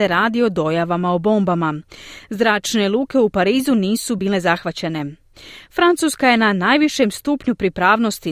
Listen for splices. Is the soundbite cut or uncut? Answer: uncut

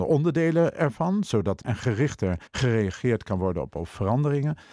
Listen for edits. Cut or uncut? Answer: cut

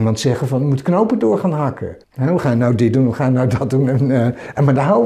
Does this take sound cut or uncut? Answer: cut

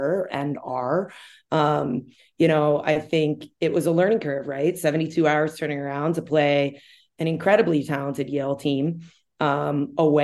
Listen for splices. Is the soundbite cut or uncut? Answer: uncut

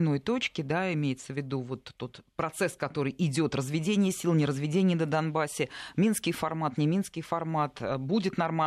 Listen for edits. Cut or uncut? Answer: uncut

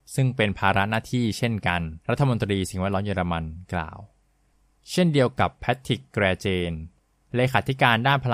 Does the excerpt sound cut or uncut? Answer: cut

